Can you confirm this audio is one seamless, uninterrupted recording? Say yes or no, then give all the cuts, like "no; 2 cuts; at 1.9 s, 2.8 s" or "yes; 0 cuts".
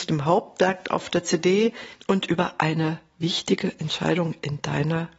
yes; 0 cuts